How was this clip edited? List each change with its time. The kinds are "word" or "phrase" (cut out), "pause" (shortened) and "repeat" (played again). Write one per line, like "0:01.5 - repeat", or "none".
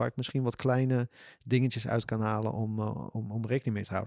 none

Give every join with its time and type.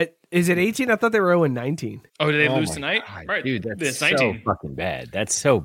0:02.1 - pause

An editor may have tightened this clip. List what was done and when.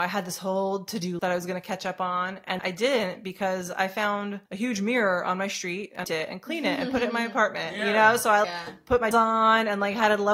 0:01.2 - word
0:02.6 - word
0:04.5 - pause
0:06.0 - phrase
0:08.4 - word
0:09.1 - word

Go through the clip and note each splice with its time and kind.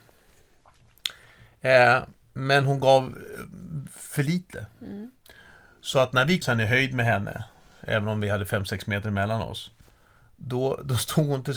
0:06.4 - word

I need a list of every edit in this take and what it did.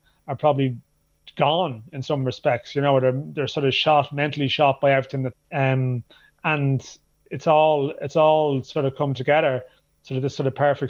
0:05.3 - word

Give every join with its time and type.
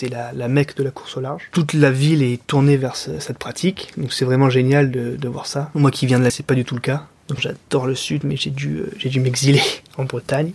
0:06.3 - word
0:07.4 - word

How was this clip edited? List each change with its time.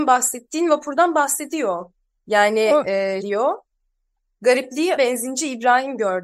0:03.2 - word
0:05.0 - word

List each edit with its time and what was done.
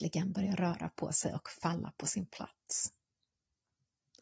none

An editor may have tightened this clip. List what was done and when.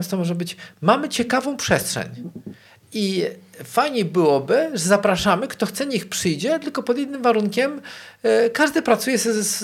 none

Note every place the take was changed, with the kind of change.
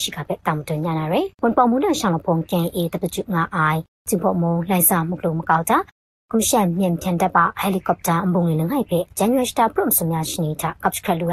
0:01.3 - pause

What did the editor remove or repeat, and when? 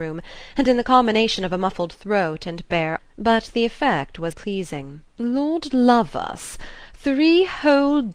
0:03.0 - word
0:04.3 - word
0:05.1 - pause

